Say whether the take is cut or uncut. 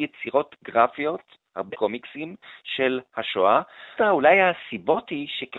cut